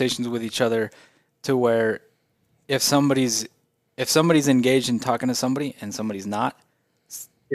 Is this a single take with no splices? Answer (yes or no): yes